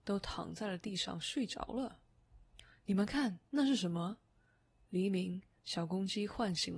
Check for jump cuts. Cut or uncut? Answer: uncut